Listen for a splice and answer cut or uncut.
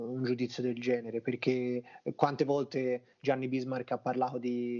uncut